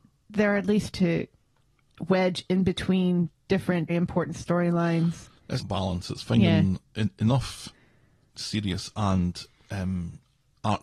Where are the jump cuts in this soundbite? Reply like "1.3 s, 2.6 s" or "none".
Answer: 0.9 s, 3.9 s, 5.6 s, 8.3 s